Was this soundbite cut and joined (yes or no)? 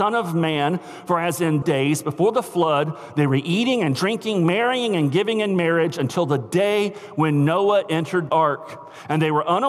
yes